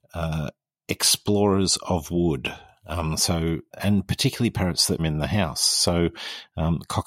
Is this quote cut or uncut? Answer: cut